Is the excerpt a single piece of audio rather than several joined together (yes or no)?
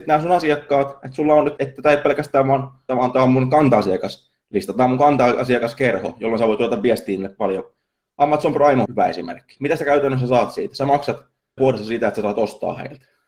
no